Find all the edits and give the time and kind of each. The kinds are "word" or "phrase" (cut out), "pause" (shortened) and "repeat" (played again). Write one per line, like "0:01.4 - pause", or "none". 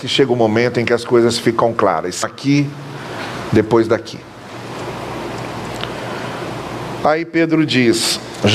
0:02.2 - word

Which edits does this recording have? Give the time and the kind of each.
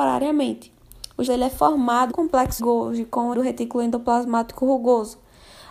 0:01.3 - word
0:02.1 - word
0:02.6 - word
0:03.3 - word

